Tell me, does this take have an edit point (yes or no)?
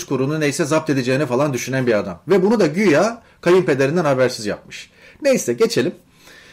no